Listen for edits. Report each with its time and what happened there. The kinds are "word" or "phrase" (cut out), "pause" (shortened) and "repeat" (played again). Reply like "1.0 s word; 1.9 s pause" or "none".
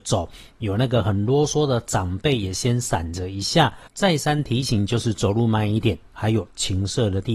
3.9 s pause